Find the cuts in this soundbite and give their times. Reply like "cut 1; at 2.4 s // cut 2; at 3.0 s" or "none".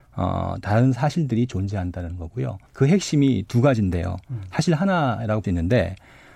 cut 1; at 2.7 s // cut 2; at 5.4 s